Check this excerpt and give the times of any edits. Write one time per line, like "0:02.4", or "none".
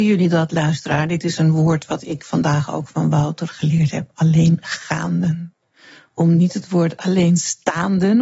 none